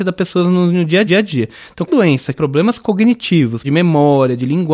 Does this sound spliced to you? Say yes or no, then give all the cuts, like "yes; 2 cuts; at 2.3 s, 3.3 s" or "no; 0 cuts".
yes; 4 cuts; at 1.1 s, 1.9 s, 2.3 s, 3.6 s